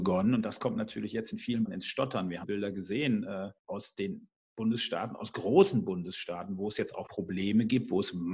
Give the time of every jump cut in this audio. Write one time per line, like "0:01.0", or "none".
0:01.6
0:02.4
0:03.6
0:07.1